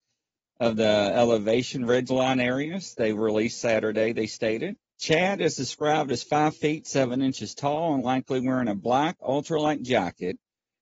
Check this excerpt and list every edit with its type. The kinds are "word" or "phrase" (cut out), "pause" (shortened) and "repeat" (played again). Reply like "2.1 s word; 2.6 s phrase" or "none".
4.9 s pause